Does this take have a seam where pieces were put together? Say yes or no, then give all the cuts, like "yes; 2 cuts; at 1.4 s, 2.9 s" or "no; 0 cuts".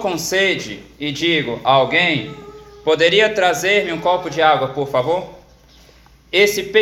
no; 0 cuts